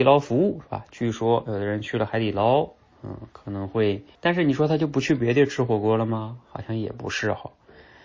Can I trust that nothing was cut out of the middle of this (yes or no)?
no